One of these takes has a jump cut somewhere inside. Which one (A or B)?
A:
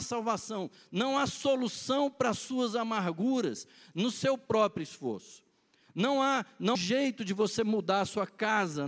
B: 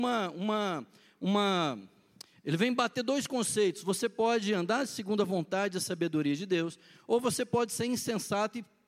A